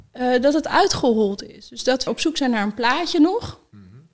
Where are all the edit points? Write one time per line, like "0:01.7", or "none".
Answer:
0:02.1